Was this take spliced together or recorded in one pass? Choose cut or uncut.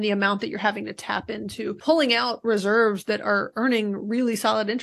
uncut